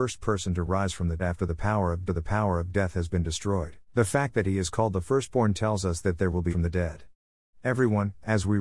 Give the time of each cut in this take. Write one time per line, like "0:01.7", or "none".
0:01.2
0:02.1
0:03.8
0:06.5

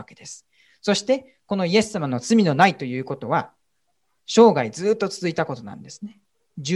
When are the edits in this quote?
none

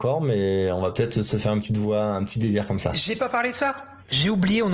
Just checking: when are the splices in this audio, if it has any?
none

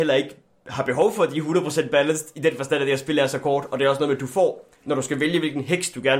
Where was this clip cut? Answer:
0:04.8

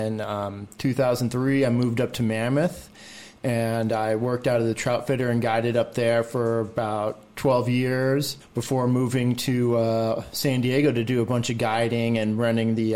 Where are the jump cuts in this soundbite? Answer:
0:08.4

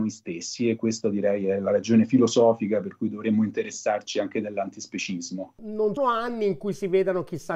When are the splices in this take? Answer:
0:06.0

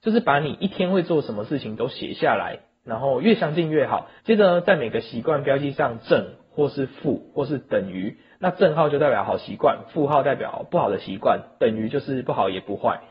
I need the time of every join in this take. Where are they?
0:04.2

